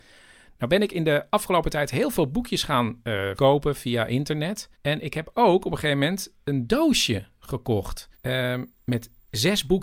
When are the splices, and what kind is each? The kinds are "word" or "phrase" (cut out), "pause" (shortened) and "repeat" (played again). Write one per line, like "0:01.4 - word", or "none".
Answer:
0:03.4 - word
0:04.7 - pause
0:08.1 - pause